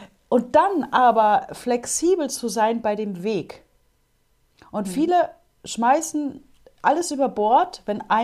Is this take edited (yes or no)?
no